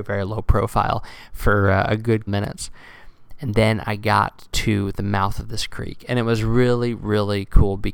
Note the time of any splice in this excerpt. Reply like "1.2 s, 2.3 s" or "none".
2.3 s